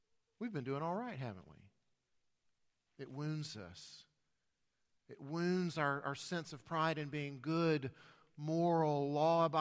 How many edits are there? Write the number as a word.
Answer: zero